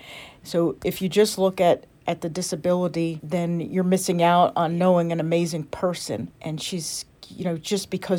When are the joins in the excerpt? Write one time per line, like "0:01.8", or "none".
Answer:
none